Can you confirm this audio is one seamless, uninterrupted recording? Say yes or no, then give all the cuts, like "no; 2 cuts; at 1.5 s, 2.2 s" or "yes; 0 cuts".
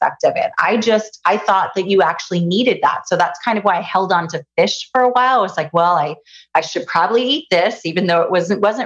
yes; 0 cuts